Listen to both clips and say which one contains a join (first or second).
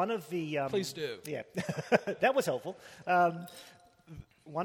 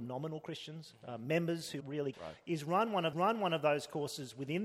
second